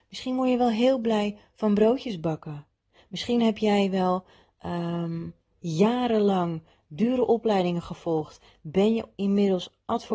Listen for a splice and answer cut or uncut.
uncut